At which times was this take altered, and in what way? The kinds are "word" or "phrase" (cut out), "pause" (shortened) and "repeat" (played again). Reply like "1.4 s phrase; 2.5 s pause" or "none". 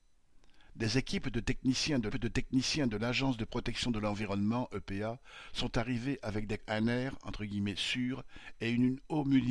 2.1 s repeat; 6.6 s phrase